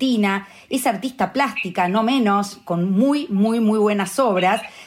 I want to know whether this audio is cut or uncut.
uncut